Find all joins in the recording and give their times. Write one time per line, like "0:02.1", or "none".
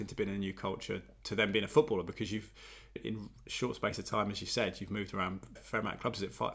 0:03.0
0:05.6